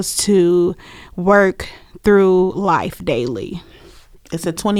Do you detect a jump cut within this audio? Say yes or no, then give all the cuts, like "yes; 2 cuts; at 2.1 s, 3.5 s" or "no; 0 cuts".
no; 0 cuts